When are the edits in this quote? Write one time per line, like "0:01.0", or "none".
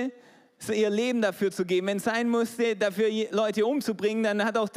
none